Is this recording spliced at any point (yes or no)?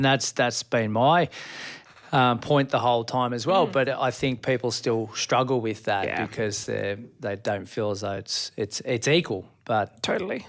no